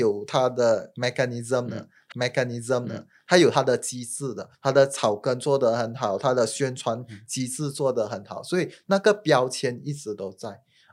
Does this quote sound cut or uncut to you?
cut